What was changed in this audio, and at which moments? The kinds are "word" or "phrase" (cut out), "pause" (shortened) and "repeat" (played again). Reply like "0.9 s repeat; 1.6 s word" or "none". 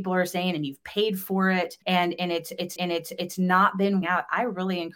1.8 s pause; 2.8 s repeat; 4.0 s word